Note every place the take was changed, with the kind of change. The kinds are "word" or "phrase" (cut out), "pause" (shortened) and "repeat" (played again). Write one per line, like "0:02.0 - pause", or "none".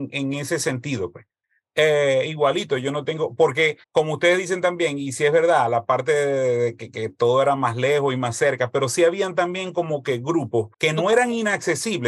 0:03.8 - pause
0:10.7 - pause